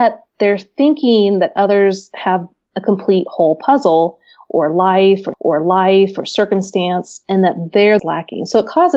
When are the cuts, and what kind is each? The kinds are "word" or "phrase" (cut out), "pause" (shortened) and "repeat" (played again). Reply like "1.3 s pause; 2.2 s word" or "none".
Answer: 5.3 s repeat; 8.0 s phrase

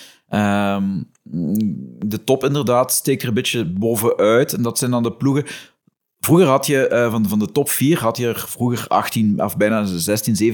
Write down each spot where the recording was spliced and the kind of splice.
none

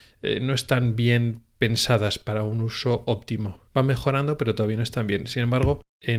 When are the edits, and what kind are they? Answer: 3.7 s pause

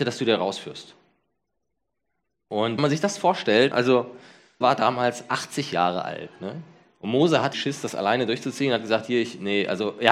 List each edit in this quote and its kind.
2.8 s word; 3.7 s word; 4.6 s word; 7.5 s word

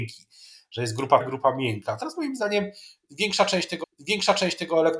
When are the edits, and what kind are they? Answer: 1.2 s word; 3.8 s repeat

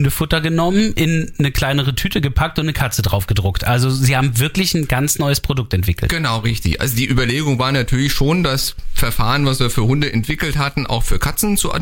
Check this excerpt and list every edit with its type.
none

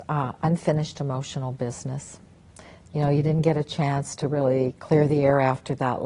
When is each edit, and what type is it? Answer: none

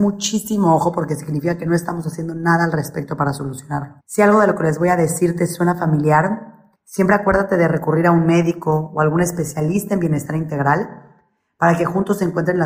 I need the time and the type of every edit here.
4.0 s pause; 6.7 s pause

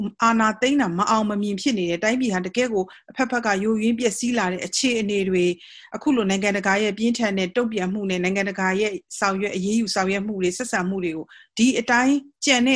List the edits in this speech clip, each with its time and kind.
11.3 s pause

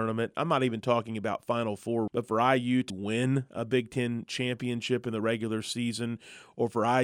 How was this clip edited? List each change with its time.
2.1 s word; 2.9 s word

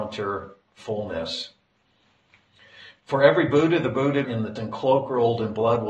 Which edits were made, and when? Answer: 4.2 s word; 4.6 s word

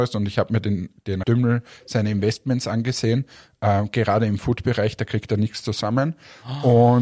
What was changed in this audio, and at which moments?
1.2 s word

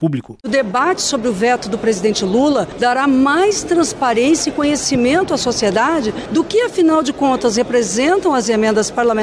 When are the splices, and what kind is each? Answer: none

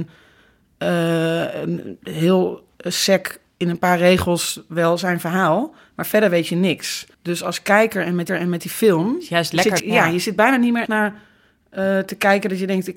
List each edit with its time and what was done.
2.7 s pause; 7.1 s pause; 8.3 s repeat; 9.8 s word; 10.9 s word

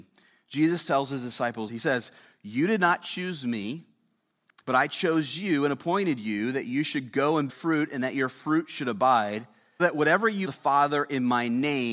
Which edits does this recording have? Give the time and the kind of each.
1.7 s word; 7.5 s word; 9.8 s word; 10.4 s word

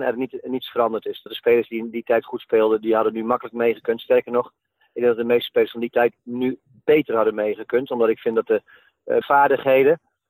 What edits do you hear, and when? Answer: 1.3 s word; 9.2 s word

